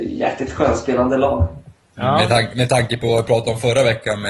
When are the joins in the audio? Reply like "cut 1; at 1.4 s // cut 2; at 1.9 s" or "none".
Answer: none